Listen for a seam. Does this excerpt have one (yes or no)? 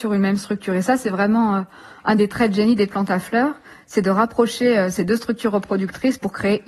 no